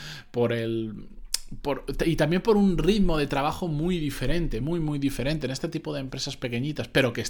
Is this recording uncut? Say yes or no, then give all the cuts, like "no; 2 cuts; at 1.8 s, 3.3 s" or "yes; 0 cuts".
yes; 0 cuts